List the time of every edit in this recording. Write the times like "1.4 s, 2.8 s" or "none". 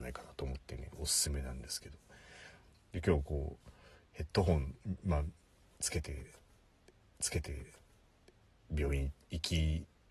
7.1 s